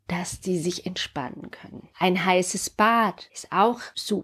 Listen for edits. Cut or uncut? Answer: cut